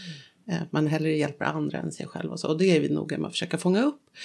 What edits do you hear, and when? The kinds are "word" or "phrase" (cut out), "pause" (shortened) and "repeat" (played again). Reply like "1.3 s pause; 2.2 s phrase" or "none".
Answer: none